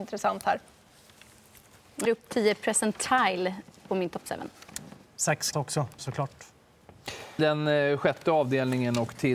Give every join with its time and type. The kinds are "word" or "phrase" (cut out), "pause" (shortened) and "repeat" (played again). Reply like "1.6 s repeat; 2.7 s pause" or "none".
2.0 s word; 5.5 s word; 6.0 s word; 7.4 s word